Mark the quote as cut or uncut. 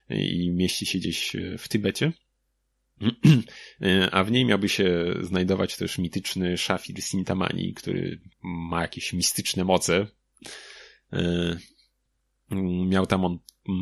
cut